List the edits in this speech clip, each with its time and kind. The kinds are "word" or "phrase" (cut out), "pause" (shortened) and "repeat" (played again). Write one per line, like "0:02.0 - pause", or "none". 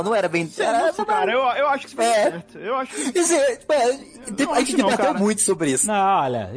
0:01.0 - word